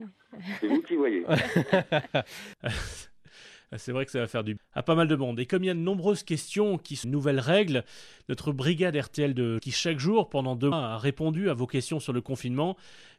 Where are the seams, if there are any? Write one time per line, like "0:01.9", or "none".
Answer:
0:04.6
0:07.0
0:09.6
0:10.7